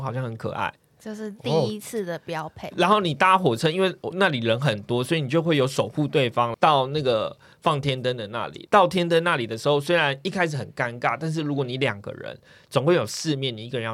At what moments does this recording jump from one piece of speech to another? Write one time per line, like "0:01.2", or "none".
none